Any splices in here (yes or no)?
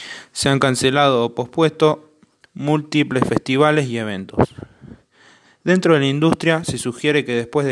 no